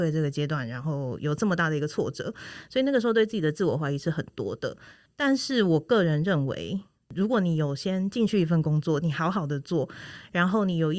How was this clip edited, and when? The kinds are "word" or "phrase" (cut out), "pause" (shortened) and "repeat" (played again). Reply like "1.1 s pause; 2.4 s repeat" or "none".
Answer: none